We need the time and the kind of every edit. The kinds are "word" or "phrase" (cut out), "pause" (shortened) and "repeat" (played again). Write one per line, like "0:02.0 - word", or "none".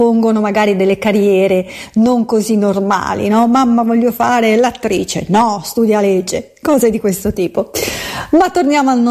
none